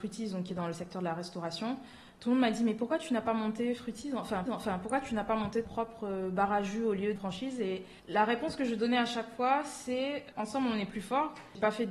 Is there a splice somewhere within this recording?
yes; 4 cuts; at 4.5 s, 5.6 s, 7.2 s, 8.0 s

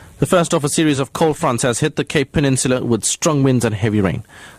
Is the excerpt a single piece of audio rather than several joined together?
yes; 0 cuts

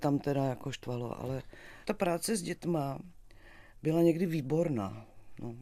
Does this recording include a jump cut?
yes; 1 cut; at 1.8 s

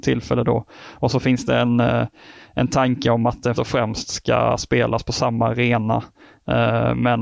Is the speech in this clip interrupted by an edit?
yes; 1 cut; at 3.6 s

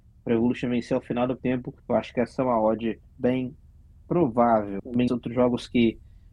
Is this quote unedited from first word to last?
no; 4 cuts; at 1.4 s, 1.8 s, 3.1 s, 5.1 s

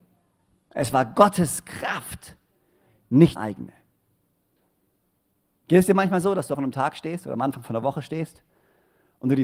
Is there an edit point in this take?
yes; 2 cuts; at 3.4 s, 6.5 s

